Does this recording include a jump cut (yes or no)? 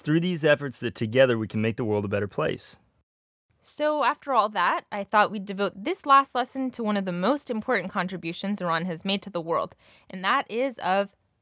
no